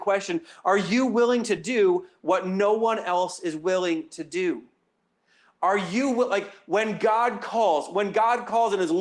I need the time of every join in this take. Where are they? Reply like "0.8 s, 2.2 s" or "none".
none